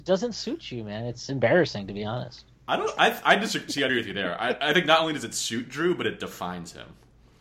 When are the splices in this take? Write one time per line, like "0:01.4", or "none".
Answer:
0:03.9